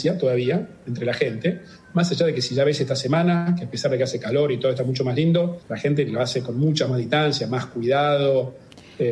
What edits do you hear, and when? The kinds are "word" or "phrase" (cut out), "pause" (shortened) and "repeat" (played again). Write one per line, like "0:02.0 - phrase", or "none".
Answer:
0:05.6 - pause